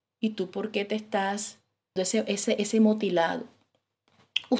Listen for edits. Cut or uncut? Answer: cut